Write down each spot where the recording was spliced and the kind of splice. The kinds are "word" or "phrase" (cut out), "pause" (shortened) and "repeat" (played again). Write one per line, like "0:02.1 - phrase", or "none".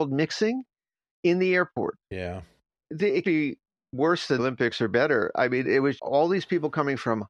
0:03.2 - word
0:04.4 - word
0:05.6 - word
0:06.0 - word